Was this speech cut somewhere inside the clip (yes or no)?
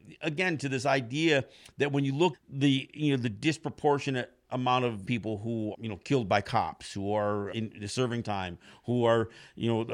yes